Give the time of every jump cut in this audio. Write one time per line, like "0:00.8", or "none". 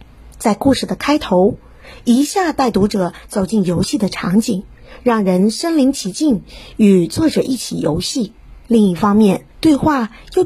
0:08.6
0:09.5